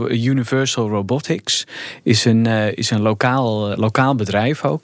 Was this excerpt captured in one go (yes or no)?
no